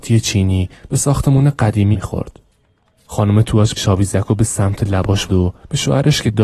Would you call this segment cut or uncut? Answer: cut